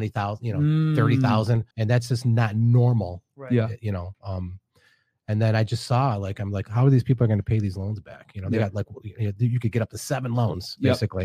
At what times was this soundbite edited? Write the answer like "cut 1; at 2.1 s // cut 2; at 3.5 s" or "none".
cut 1; at 1.7 s